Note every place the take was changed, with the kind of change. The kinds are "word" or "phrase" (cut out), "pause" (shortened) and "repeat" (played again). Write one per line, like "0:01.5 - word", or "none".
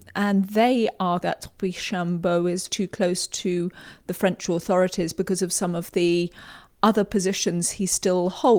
0:01.2 - word
0:02.7 - word